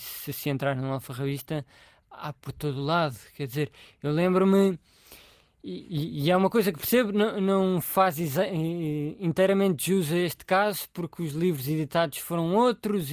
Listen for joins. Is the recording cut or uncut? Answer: uncut